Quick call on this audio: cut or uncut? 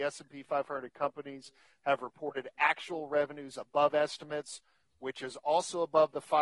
uncut